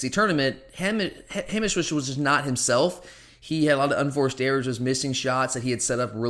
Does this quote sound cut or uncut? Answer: uncut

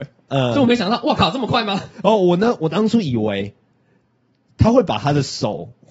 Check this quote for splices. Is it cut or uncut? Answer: uncut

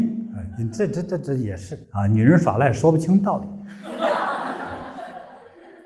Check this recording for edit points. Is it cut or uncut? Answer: cut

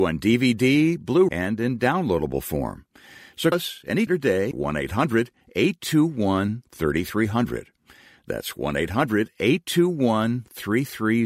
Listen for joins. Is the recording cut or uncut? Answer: cut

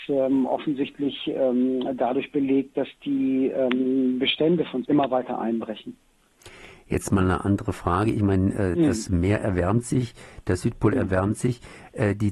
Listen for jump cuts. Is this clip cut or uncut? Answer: cut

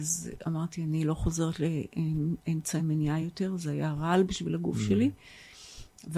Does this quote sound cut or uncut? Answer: uncut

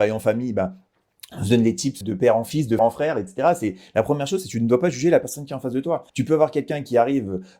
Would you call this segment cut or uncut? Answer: cut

